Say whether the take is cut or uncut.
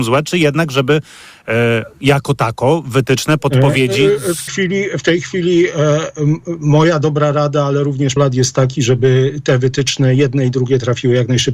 cut